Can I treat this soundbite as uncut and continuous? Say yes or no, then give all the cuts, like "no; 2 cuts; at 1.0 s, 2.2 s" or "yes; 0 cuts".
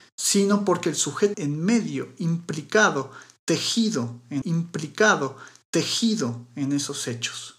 no; 2 cuts; at 1.3 s, 4.4 s